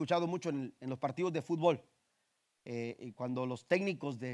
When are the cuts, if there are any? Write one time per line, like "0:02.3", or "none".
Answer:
none